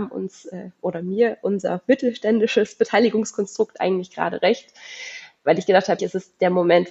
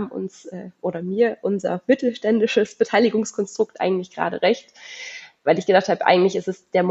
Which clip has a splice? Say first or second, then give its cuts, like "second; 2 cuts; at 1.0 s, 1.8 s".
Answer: first; 1 cut; at 6.0 s